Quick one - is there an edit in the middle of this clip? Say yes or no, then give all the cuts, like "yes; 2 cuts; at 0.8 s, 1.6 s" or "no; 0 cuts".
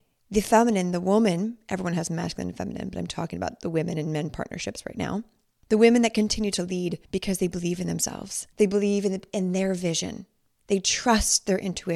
yes; 2 cuts; at 7.0 s, 8.5 s